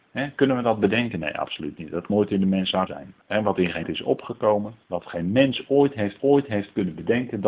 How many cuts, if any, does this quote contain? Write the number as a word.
six